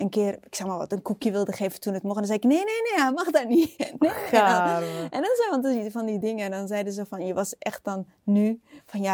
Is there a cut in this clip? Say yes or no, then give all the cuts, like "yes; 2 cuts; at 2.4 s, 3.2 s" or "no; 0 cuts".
no; 0 cuts